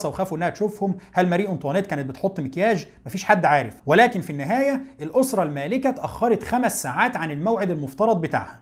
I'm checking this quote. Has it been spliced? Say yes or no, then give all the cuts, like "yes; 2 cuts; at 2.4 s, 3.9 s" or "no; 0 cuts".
no; 0 cuts